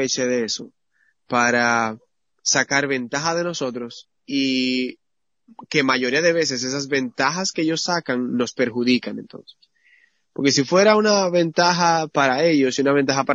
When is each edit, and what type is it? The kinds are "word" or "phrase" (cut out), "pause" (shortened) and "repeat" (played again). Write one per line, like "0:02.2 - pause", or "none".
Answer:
0:04.2 - pause

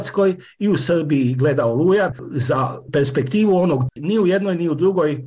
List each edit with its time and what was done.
0:03.9 - word

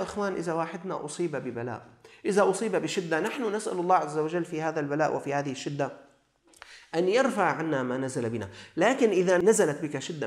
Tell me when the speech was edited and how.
none

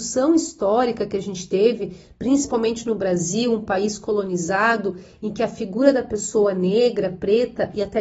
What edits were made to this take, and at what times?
none

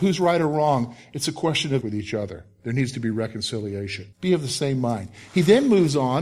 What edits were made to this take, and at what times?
0:01.8 - phrase
0:04.1 - pause

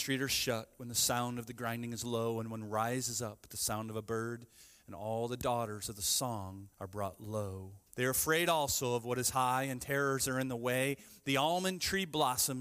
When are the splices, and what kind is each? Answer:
0:06.7 - pause
0:07.9 - pause

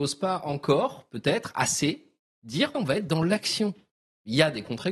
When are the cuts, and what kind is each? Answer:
0:02.7 - word

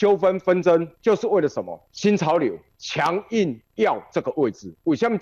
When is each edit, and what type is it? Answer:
0:00.9 - pause
0:01.9 - pause

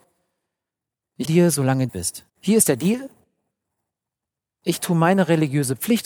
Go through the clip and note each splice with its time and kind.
0:01.2 - word
0:01.9 - phrase
0:02.3 - pause

